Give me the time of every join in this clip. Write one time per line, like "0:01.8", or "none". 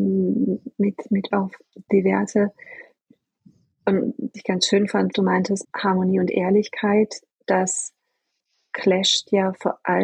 0:01.3
0:04.3
0:05.1
0:05.6